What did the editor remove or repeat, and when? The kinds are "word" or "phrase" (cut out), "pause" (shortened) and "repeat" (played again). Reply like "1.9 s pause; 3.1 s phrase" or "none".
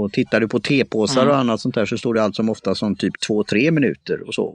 none